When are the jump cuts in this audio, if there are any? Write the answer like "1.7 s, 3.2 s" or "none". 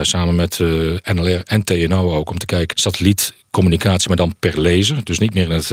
2.7 s